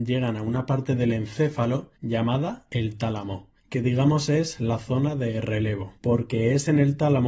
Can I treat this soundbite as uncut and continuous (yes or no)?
no